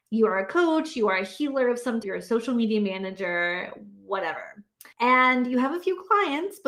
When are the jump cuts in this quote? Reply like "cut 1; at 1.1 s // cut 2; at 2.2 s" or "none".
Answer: cut 1; at 2.0 s // cut 2; at 4.9 s